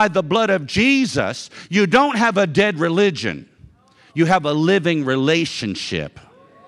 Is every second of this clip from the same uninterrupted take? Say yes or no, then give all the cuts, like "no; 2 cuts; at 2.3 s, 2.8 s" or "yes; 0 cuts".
yes; 0 cuts